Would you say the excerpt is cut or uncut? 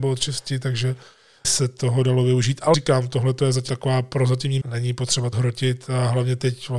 cut